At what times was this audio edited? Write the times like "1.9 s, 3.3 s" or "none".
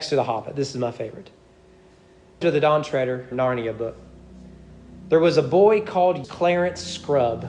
2.4 s, 3.3 s, 6.2 s